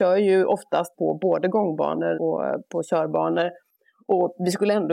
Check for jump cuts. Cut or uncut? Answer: cut